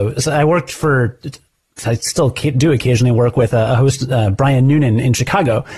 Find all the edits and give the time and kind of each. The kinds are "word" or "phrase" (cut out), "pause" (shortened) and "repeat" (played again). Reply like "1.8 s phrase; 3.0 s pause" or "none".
none